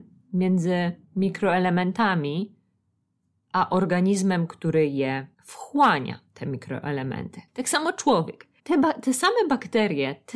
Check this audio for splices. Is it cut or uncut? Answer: cut